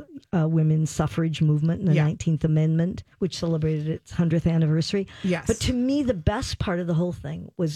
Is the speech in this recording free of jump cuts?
no; 1 cut; at 3.1 s

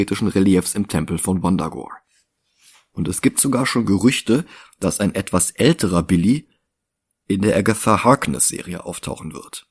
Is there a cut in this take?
no; 0 cuts

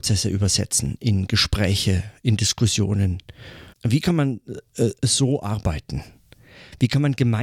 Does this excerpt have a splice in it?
yes; 1 cut; at 3.7 s

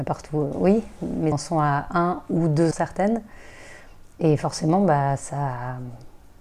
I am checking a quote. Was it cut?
yes; 3 cuts; at 1.3 s, 2.7 s, 4.1 s

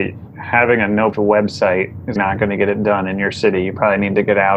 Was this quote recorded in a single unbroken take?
no; 2 cuts; at 1.1 s, 2.2 s

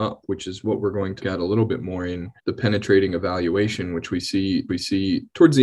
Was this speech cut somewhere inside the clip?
yes; 3 cuts; at 1.2 s, 2.4 s, 4.7 s

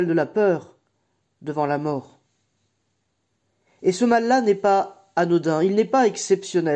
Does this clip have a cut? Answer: no; 0 cuts

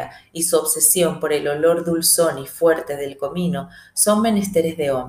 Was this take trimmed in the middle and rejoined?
no; 0 cuts

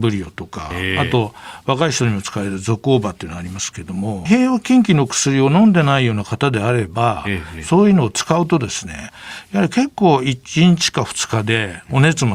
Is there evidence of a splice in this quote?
yes; 1 cut; at 4.3 s

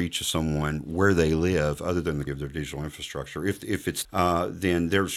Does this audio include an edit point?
yes; 2 cuts; at 2.3 s, 4.0 s

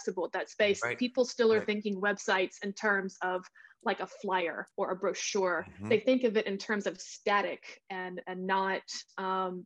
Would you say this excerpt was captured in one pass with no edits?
no; 1 cut; at 4.7 s

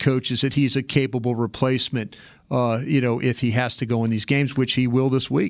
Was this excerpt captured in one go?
yes; 0 cuts

